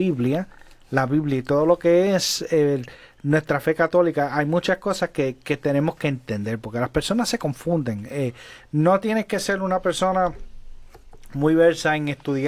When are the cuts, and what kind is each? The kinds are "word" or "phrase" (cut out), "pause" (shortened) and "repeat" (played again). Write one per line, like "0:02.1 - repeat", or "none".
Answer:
none